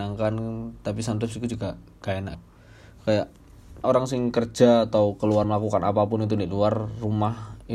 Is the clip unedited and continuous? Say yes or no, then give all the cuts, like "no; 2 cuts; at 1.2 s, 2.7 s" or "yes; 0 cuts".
no; 3 cuts; at 2.3 s, 3.8 s, 5.4 s